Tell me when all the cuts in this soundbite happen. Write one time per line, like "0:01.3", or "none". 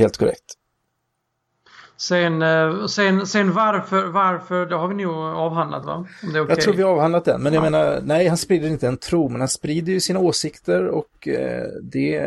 none